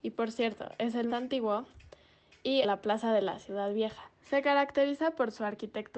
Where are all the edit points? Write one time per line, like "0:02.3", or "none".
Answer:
0:01.1
0:02.6